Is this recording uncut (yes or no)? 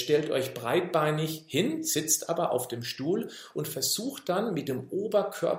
yes